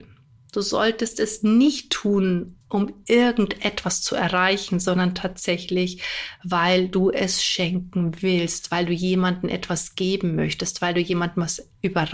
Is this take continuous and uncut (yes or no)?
no